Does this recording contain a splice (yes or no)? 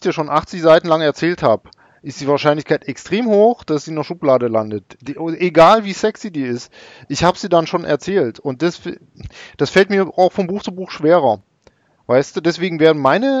no